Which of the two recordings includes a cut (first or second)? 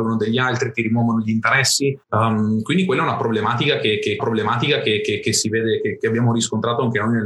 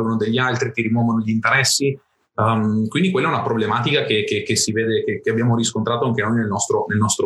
first